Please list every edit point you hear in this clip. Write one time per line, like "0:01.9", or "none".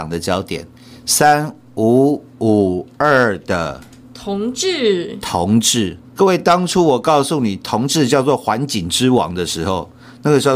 0:06.0